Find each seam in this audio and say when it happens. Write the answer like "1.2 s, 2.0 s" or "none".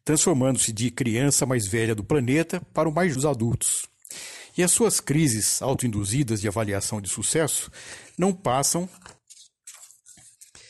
3.1 s